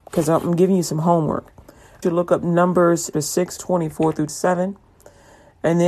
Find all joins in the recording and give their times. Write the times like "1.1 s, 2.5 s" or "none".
2.0 s, 3.1 s, 3.6 s, 4.3 s